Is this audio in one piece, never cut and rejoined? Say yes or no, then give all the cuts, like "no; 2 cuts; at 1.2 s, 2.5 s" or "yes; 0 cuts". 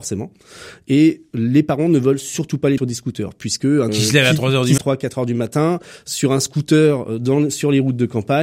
no; 3 cuts; at 2.8 s, 3.9 s, 4.8 s